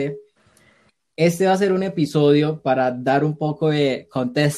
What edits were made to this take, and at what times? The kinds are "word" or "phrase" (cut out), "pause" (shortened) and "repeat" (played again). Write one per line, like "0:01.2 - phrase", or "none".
0:02.6 - word